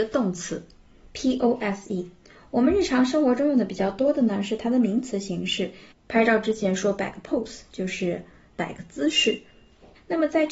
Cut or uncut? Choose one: uncut